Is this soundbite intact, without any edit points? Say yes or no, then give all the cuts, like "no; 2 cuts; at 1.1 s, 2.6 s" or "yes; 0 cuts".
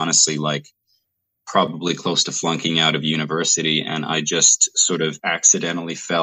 yes; 0 cuts